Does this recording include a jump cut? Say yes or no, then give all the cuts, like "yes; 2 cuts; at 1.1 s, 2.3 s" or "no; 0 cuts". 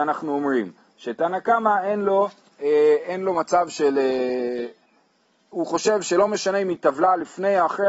no; 0 cuts